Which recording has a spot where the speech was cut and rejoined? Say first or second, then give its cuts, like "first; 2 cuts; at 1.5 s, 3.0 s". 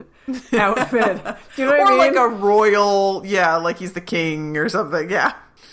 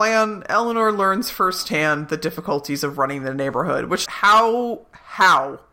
second; 1 cut; at 4.1 s